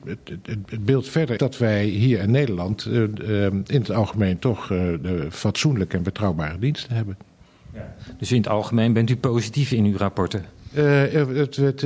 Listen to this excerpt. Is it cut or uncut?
cut